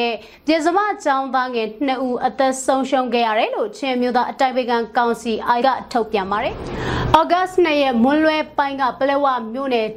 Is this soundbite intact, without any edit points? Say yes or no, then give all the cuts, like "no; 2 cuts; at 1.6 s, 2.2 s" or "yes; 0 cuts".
no; 1 cut; at 5.6 s